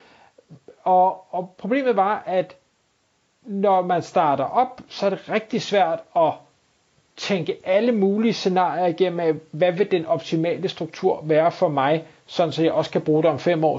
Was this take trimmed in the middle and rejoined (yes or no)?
no